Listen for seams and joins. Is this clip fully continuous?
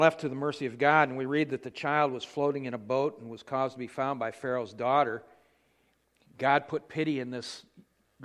yes; 0 cuts

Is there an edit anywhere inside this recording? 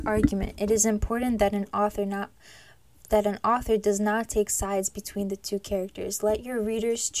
no; 0 cuts

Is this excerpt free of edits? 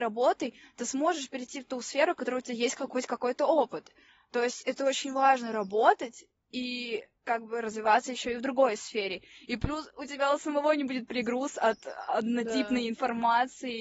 yes; 0 cuts

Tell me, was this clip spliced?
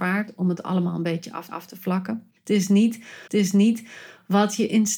yes; 3 cuts; at 1.5 s, 2.4 s, 3.3 s

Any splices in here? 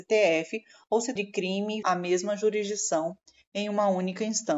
yes; 2 cuts; at 1.2 s, 1.8 s

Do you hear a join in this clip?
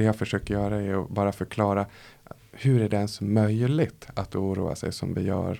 no; 0 cuts

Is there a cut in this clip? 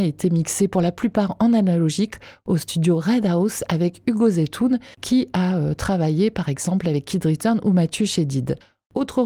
yes; 1 cut; at 4.9 s

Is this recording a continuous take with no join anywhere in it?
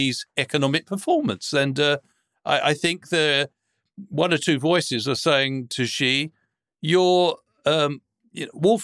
yes; 0 cuts

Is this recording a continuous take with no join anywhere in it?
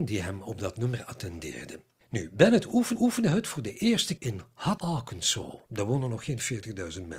no; 5 cuts; at 2.0 s, 2.9 s, 4.2 s, 4.8 s, 5.7 s

